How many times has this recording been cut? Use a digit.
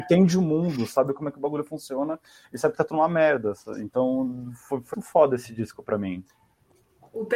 1